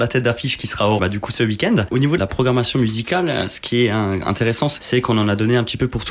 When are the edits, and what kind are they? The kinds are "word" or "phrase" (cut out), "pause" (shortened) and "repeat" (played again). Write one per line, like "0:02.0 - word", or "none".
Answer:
0:01.0 - word